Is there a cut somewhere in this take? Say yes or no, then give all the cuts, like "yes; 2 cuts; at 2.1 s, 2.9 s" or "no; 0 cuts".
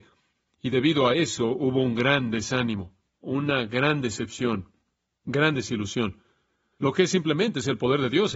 no; 0 cuts